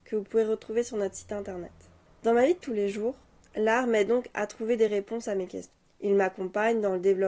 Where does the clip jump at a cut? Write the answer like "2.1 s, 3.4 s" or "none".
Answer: none